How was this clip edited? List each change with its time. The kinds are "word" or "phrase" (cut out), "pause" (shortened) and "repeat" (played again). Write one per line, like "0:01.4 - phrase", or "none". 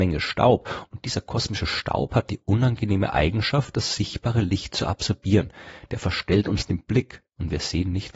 none